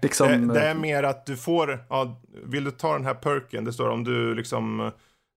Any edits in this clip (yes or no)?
no